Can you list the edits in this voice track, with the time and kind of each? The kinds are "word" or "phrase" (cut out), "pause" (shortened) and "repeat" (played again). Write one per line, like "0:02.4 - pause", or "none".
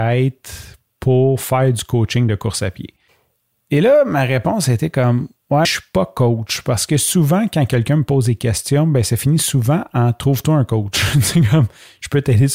0:05.6 - word